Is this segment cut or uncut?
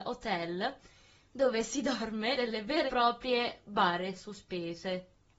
cut